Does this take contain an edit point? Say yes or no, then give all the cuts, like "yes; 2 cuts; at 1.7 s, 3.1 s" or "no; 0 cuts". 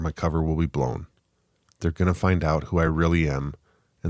no; 0 cuts